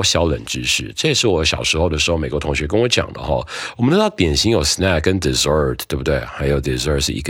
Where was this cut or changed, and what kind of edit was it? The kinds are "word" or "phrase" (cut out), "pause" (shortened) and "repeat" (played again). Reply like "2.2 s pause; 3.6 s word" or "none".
none